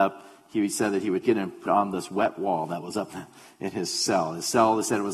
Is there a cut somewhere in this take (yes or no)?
yes